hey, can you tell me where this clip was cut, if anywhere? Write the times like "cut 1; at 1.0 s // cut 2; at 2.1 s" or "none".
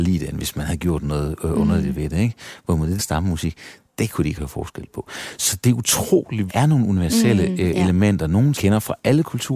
cut 1; at 3.0 s // cut 2; at 4.4 s // cut 3; at 6.5 s // cut 4; at 8.5 s